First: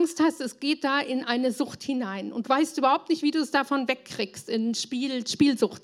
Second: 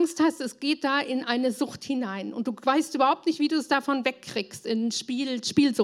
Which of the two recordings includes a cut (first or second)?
first